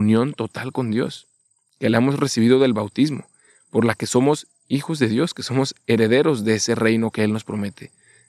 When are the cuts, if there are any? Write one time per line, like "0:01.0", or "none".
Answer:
none